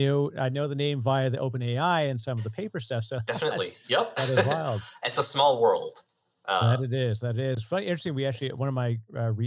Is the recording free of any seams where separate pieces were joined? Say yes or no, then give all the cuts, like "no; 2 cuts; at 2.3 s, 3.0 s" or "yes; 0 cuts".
yes; 0 cuts